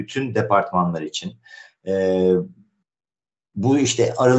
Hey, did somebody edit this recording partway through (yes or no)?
no